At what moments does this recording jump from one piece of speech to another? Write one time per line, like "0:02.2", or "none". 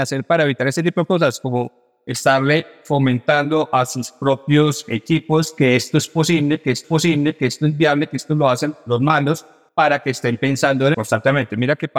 0:06.8
0:09.7
0:10.9